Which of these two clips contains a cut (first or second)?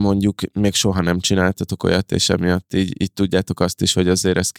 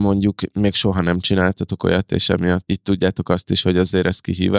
second